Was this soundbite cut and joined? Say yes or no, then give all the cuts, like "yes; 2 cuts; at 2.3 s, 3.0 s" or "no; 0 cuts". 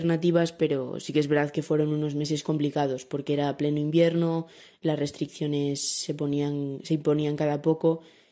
no; 0 cuts